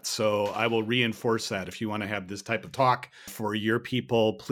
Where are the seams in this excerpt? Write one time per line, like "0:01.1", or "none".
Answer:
0:03.3